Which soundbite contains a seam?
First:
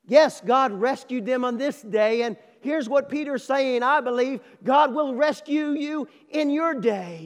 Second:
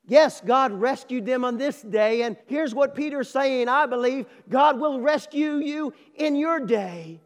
second; 1 cut; at 2.4 s

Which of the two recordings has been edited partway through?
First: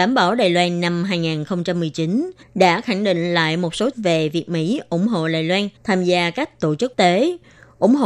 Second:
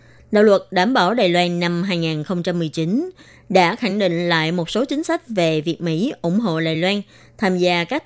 first; 4 cuts; at 2.4 s, 3.9 s, 5.8 s, 6.9 s

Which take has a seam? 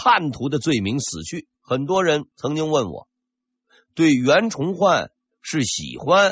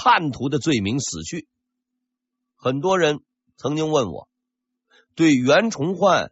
first; 2 cuts; at 1.5 s, 2.3 s

